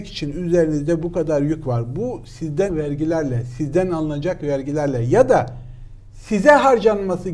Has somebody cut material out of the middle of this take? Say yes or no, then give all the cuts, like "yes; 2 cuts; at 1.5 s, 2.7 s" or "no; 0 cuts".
yes; 1 cut; at 2.7 s